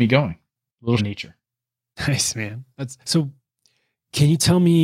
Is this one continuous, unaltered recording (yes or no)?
no